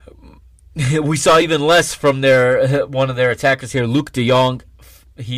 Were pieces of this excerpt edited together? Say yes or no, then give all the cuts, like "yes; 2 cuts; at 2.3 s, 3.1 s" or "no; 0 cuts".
no; 0 cuts